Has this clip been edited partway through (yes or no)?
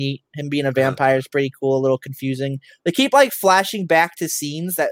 no